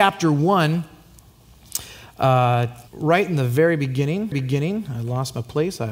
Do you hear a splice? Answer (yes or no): yes